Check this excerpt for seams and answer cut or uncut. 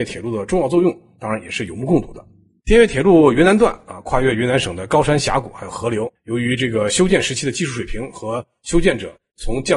cut